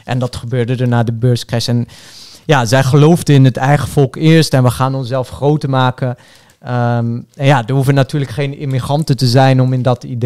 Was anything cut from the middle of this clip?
no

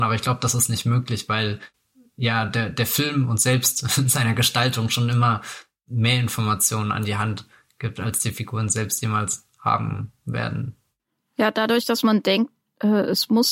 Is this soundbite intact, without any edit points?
yes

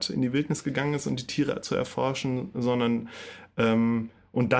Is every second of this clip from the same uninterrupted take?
yes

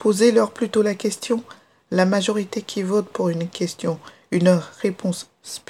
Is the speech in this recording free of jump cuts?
yes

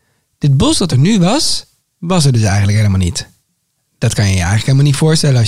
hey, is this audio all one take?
yes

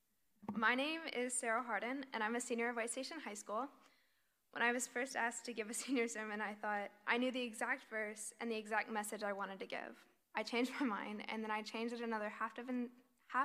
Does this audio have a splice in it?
no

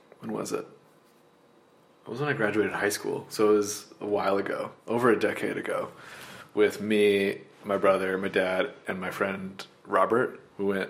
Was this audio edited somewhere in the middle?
yes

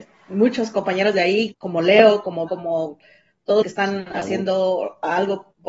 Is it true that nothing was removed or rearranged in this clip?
no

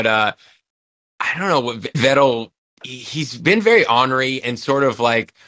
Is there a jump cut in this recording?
yes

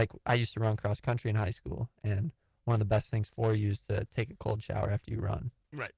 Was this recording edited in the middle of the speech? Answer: no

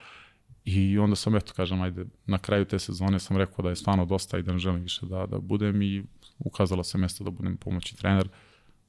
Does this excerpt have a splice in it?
no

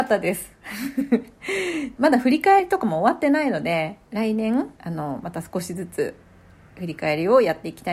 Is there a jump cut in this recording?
yes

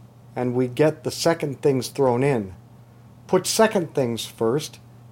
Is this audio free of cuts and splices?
yes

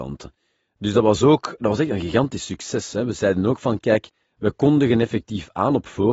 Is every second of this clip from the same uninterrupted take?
yes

